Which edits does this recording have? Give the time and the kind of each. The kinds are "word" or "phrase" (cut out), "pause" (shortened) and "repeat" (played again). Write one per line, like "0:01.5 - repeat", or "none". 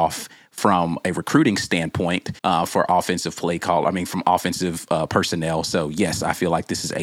0:02.4 - pause